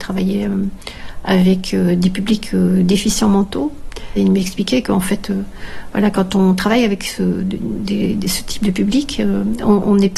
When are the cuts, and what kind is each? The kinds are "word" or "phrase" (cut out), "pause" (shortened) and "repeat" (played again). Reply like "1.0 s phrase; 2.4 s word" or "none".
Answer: none